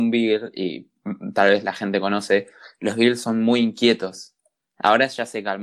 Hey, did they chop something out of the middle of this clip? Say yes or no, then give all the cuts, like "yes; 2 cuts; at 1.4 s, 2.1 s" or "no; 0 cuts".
no; 0 cuts